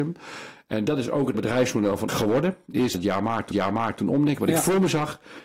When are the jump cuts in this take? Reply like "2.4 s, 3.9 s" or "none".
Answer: 1.3 s, 2.1 s, 2.9 s, 3.5 s